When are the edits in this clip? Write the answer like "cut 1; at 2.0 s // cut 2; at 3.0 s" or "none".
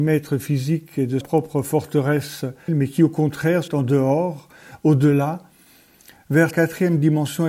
cut 1; at 1.2 s // cut 2; at 2.7 s // cut 3; at 3.7 s // cut 4; at 6.5 s